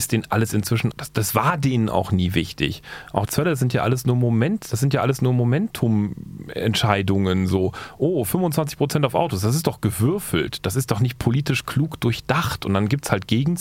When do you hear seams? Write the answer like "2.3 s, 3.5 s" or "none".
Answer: 0.9 s, 3.3 s